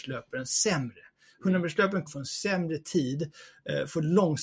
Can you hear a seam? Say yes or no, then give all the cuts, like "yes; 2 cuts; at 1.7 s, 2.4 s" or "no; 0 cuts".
yes; 1 cut; at 2.1 s